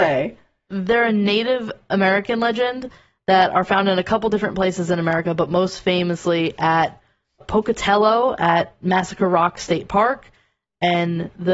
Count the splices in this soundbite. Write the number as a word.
one